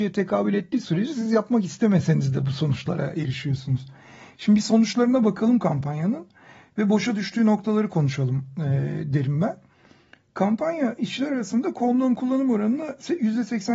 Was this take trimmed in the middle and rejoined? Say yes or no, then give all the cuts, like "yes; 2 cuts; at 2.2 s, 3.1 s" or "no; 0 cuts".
no; 0 cuts